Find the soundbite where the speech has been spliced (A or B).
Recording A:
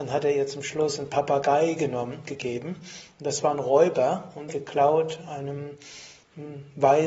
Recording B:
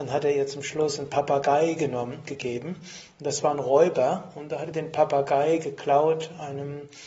A